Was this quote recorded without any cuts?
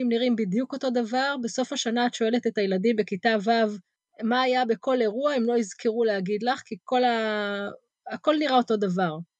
yes; 0 cuts

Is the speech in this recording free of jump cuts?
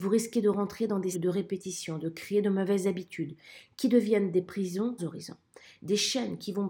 no; 2 cuts; at 1.1 s, 5.0 s

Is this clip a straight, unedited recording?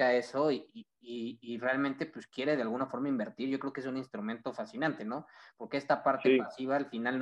no; 1 cut; at 1.0 s

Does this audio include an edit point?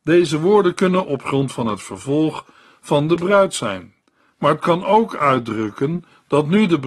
no; 0 cuts

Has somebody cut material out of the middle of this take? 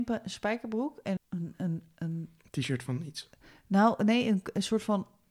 yes; 2 cuts; at 1.2 s, 2.4 s

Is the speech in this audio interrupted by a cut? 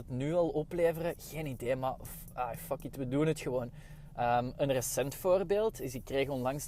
no; 0 cuts

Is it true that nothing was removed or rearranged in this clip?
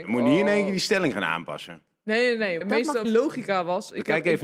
no; 2 cuts; at 2.6 s, 3.0 s

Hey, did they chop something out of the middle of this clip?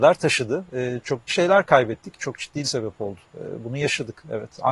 yes; 2 cuts; at 1.3 s, 2.6 s

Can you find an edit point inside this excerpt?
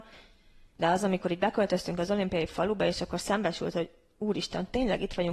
no; 0 cuts

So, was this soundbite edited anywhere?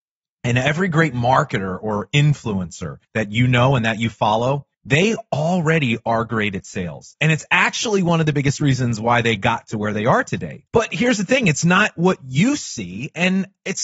yes; 3 cuts; at 3.0 s, 4.7 s, 10.7 s

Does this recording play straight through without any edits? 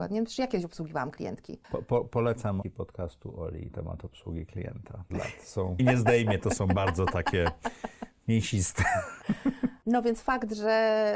no; 4 cuts; at 2.6 s, 3.7 s, 5.1 s, 5.8 s

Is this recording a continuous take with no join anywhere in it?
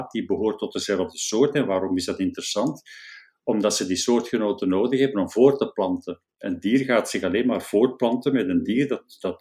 yes; 0 cuts

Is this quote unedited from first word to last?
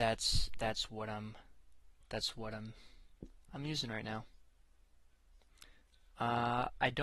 no; 1 cut; at 2.0 s

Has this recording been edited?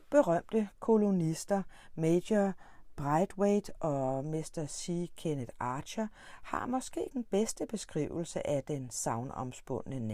yes; 1 cut; at 7.1 s

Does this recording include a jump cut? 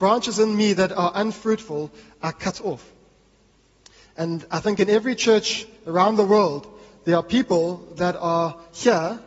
no; 0 cuts

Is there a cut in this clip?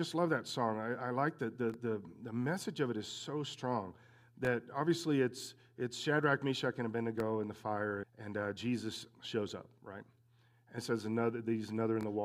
yes; 2 cuts; at 8.0 s, 10.8 s

